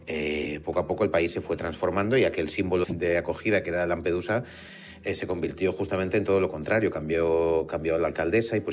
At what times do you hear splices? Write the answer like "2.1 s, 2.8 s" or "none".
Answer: 2.8 s